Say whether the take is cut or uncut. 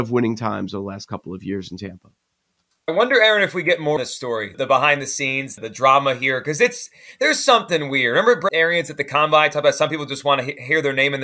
cut